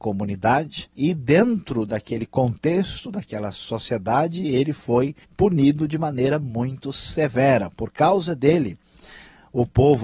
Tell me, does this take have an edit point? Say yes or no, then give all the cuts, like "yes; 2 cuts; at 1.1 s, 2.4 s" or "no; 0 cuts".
yes; 2 cuts; at 0.9 s, 5.2 s